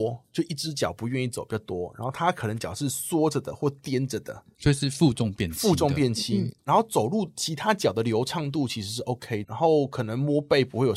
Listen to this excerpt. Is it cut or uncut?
cut